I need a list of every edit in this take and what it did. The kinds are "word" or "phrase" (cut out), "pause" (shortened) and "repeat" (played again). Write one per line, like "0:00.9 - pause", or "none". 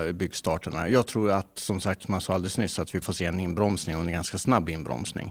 0:03.0 - word